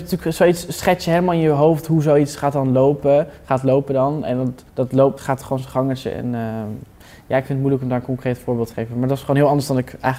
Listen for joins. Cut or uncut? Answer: cut